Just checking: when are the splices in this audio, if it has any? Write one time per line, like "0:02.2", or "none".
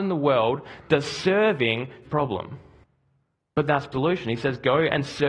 0:02.1
0:02.8
0:03.9